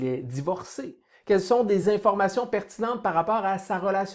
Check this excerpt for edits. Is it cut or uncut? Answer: uncut